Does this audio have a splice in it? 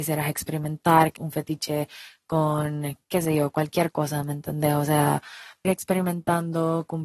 yes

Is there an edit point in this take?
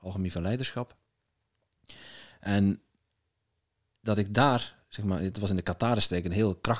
no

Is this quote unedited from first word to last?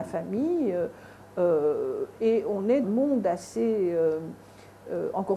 no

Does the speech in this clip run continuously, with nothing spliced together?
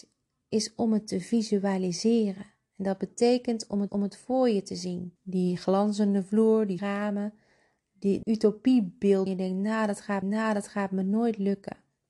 no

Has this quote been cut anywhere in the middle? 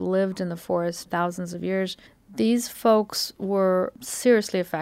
yes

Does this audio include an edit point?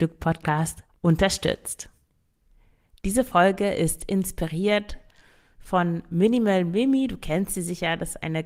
no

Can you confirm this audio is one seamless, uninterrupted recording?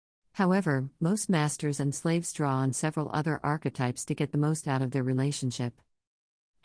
yes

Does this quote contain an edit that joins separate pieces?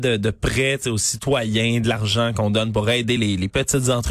no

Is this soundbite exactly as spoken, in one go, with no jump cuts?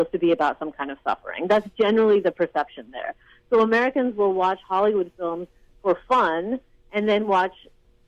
yes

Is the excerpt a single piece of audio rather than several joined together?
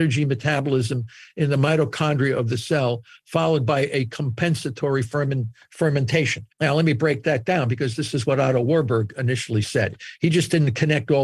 no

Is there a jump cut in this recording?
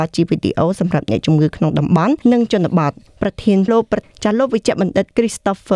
yes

